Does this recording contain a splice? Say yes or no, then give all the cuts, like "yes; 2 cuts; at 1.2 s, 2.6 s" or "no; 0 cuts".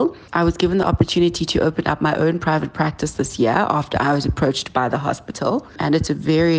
no; 0 cuts